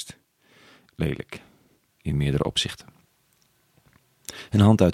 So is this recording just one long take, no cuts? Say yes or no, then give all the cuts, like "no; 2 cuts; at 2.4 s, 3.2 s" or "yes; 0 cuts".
yes; 0 cuts